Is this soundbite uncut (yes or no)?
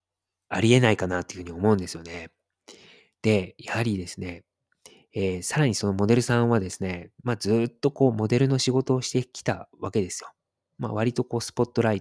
yes